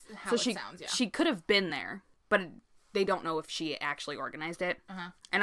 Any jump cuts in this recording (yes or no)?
no